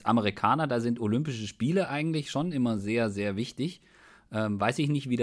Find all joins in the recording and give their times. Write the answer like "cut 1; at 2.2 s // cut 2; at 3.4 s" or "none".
none